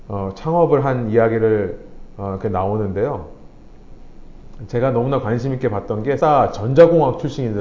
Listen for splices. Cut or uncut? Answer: cut